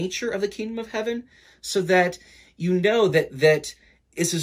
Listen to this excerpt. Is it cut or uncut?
uncut